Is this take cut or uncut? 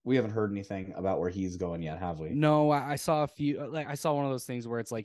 uncut